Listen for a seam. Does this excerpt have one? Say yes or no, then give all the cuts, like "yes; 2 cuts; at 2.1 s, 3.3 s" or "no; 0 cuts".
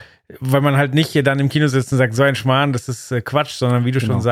no; 0 cuts